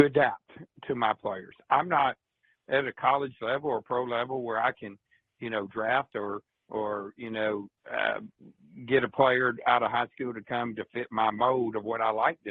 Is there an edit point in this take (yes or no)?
no